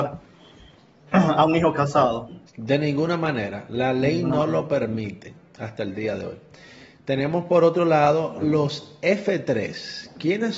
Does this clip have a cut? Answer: yes; 1 cut; at 2.5 s

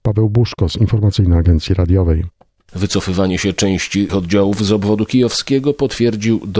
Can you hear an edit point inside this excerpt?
yes; 1 cut; at 4.1 s

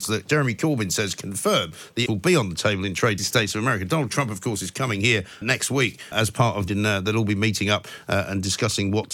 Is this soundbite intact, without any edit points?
no; 5 cuts; at 2.1 s, 3.2 s, 5.4 s, 6.1 s, 6.7 s

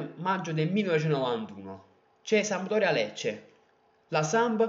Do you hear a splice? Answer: yes; 1 cut; at 2.0 s

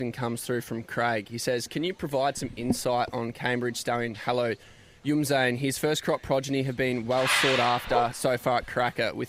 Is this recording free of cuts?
yes; 0 cuts

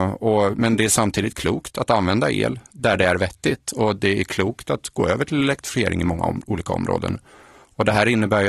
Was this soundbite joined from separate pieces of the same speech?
no; 0 cuts

